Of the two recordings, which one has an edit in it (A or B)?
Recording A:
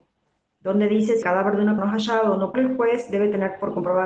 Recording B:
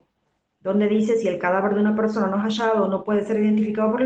A